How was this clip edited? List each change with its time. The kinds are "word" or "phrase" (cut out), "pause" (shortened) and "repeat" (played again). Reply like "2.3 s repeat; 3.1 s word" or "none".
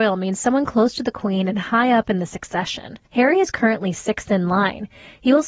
3.0 s pause